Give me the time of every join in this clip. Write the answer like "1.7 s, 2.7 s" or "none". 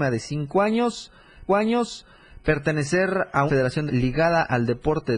1.5 s, 3.5 s, 3.9 s

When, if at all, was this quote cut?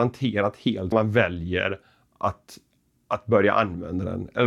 0.9 s

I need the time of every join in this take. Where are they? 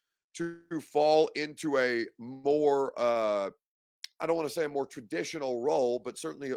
4.1 s

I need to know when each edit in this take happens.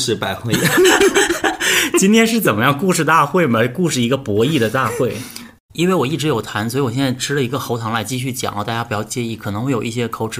none

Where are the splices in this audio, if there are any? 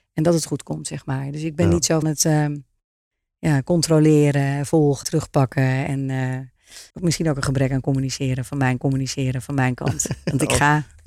2.0 s, 5.0 s, 6.9 s, 8.8 s

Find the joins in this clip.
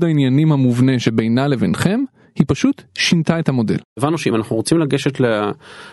none

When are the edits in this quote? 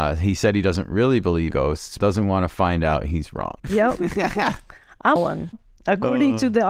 1.5 s, 2.0 s, 3.6 s, 5.2 s

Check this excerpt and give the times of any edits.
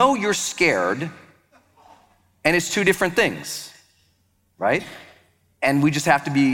none

